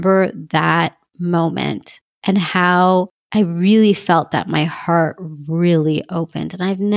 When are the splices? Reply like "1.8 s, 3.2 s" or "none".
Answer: none

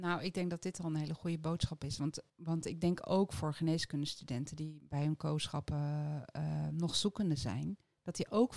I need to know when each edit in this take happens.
2.3 s

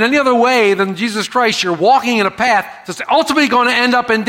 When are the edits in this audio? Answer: none

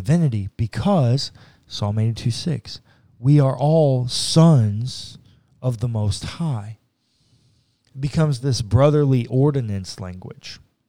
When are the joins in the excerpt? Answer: none

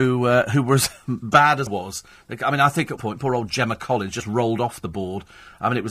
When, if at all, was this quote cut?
1.7 s, 3.0 s

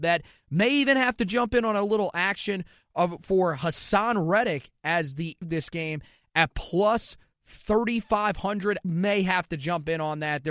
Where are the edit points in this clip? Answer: 5.4 s, 8.8 s

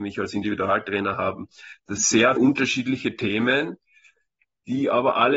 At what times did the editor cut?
2.0 s, 2.4 s

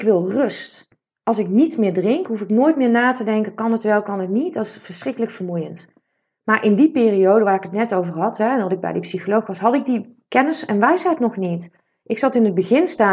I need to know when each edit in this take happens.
none

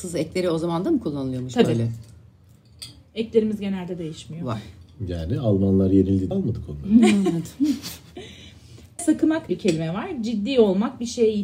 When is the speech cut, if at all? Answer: 6.3 s, 9.0 s, 9.5 s

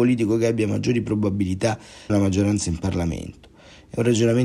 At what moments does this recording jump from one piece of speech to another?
2.1 s

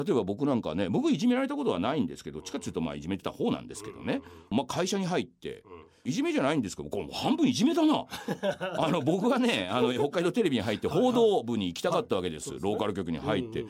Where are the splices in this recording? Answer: none

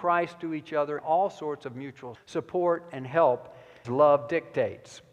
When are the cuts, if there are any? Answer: 1.0 s, 2.1 s, 3.8 s

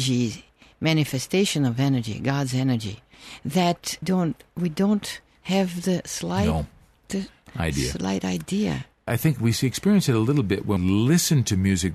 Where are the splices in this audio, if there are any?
4.0 s, 9.1 s, 10.8 s

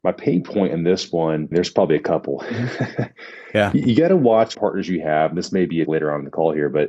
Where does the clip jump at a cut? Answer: 1.5 s, 4.5 s, 5.9 s

